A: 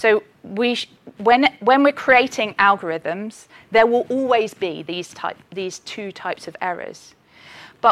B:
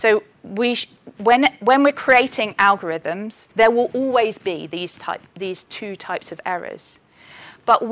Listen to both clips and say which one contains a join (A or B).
B